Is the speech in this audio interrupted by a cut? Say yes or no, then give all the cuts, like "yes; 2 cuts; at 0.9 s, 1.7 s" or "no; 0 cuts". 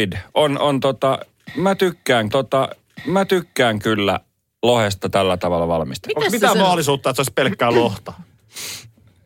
yes; 1 cut; at 2.3 s